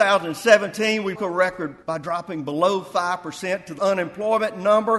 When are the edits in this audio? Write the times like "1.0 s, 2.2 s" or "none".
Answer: 1.1 s, 1.8 s, 3.8 s